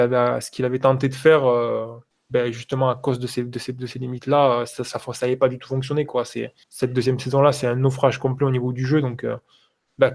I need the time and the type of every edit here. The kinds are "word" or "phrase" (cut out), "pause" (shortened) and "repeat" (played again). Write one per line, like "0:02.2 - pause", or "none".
0:02.1 - pause
0:06.6 - pause